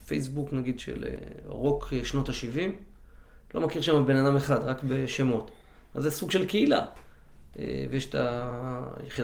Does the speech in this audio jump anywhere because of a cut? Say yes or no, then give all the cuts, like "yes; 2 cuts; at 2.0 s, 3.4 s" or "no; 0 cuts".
no; 0 cuts